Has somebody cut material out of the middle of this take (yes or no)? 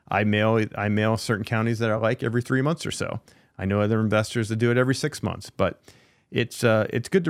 no